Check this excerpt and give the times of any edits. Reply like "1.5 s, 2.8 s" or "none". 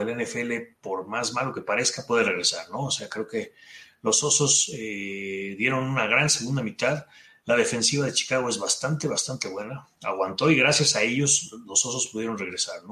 none